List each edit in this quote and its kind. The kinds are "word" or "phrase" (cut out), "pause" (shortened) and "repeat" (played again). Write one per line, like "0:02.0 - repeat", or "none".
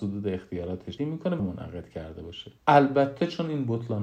0:01.0 - word
0:01.4 - phrase
0:02.6 - pause